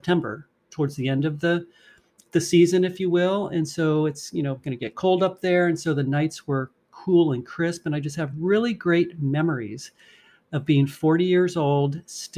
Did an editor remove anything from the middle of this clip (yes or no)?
no